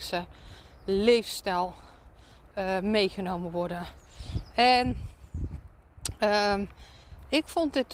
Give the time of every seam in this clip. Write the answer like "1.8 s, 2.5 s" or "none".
none